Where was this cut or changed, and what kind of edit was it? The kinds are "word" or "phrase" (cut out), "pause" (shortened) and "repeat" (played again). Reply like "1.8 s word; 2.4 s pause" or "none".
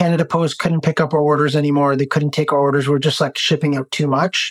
none